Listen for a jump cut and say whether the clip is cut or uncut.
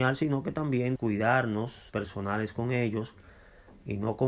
cut